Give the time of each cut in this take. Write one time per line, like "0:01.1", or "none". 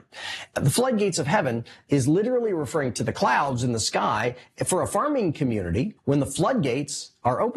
0:06.0